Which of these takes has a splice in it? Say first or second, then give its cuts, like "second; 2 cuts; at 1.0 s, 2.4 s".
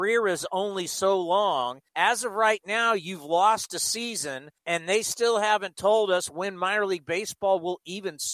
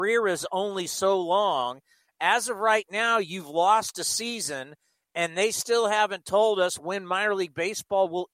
first; 2 cuts; at 1.9 s, 4.6 s